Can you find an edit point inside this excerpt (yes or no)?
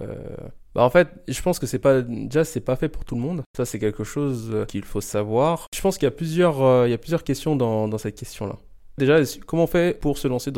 no